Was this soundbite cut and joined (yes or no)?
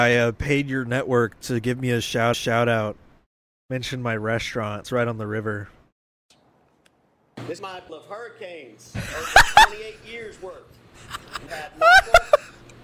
yes